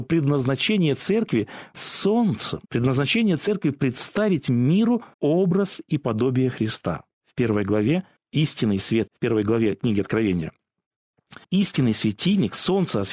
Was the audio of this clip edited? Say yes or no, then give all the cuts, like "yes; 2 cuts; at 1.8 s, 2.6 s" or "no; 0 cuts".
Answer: yes; 7 cuts; at 1.7 s, 2.6 s, 5.1 s, 7.1 s, 8.2 s, 9.1 s, 11.4 s